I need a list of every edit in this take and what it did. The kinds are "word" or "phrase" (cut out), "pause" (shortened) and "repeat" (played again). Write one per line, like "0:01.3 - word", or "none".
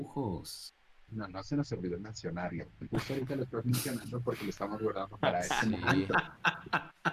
none